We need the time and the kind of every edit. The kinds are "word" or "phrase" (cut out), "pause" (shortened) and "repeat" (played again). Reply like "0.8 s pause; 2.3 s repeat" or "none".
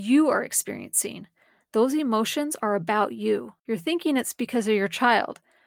3.6 s pause